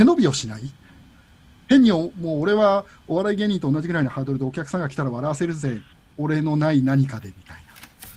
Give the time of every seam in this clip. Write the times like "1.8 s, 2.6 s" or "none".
5.9 s